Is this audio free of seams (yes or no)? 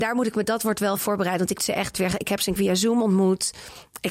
no